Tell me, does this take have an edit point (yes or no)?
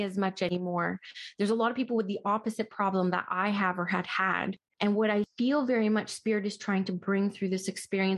no